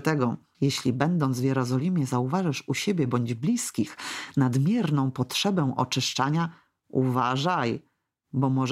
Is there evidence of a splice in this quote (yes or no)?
no